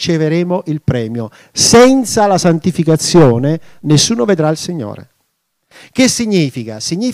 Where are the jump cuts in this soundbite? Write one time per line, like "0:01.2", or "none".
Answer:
none